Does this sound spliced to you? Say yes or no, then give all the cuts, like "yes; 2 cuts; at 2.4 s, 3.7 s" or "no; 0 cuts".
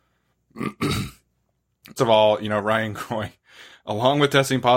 yes; 1 cut; at 2.0 s